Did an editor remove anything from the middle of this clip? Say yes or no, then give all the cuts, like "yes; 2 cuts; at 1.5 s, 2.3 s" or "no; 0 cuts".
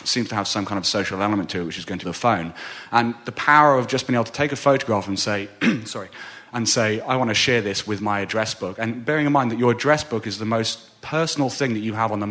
yes; 1 cut; at 2.0 s